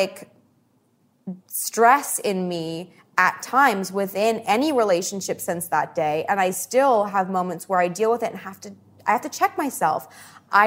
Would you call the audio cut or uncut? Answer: cut